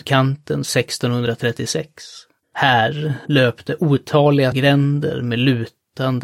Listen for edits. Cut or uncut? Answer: cut